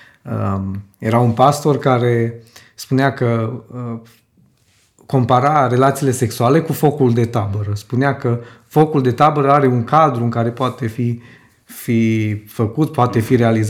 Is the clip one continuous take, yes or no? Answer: yes